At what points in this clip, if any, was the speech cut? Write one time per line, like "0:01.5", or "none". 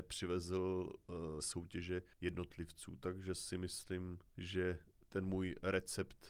0:01.4
0:02.1
0:04.3